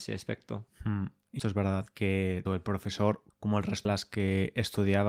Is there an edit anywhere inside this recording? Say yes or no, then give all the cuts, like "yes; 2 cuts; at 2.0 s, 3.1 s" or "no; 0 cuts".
yes; 4 cuts; at 1.4 s, 2.5 s, 3.3 s, 3.9 s